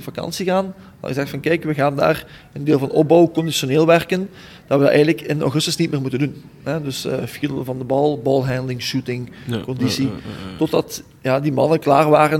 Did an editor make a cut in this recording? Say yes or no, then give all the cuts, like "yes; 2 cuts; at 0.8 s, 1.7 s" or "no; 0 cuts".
no; 0 cuts